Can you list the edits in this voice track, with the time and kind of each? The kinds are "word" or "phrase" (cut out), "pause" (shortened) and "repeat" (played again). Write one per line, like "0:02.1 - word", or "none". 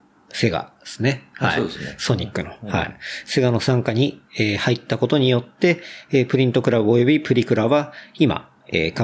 0:04.2 - pause

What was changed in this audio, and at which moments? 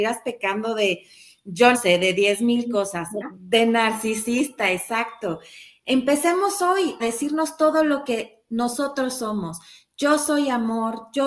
0:01.7 - word
0:03.2 - word
0:07.0 - word

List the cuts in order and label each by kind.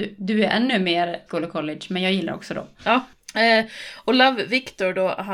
0:01.3 - word

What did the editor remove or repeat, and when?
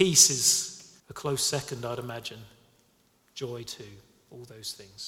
0:01.0 - pause

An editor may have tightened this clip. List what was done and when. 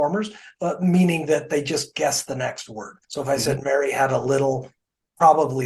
0:03.0 - pause

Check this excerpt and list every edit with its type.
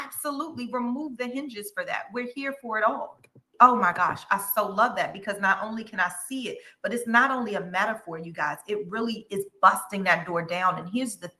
none

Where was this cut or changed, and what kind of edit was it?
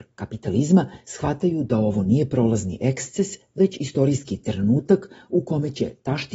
none

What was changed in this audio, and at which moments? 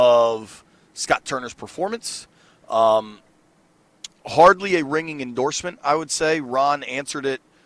none

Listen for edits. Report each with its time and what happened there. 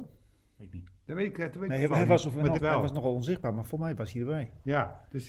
0:02.6 - word

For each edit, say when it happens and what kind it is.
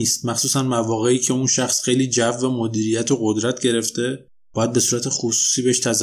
none

